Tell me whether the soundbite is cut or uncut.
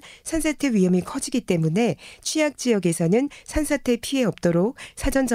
uncut